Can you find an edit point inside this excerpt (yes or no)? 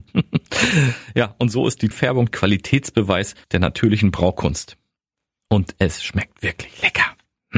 yes